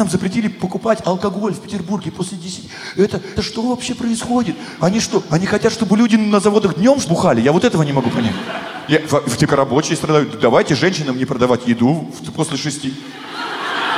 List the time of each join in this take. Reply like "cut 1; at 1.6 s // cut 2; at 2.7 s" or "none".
cut 1; at 3.4 s // cut 2; at 7.1 s // cut 3; at 9.5 s